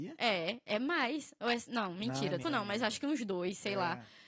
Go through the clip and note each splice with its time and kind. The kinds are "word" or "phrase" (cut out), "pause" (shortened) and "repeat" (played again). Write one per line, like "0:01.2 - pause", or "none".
0:02.4 - word